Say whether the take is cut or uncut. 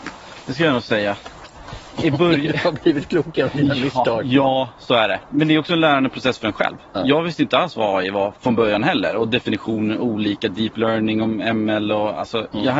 uncut